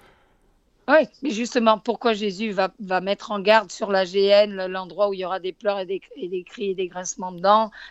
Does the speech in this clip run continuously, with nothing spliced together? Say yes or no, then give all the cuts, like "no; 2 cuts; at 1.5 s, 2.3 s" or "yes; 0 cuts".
yes; 0 cuts